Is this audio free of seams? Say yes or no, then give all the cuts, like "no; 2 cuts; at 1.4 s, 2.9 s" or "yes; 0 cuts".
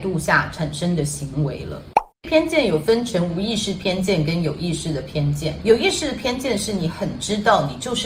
no; 1 cut; at 2.1 s